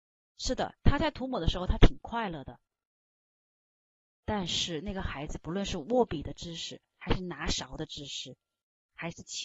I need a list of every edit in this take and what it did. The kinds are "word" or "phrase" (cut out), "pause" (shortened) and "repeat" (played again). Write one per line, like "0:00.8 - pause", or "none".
none